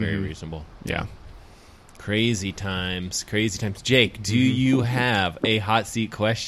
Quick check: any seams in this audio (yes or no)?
no